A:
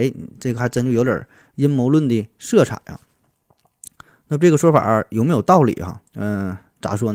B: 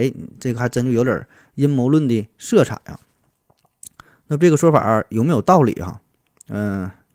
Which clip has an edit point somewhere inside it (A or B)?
A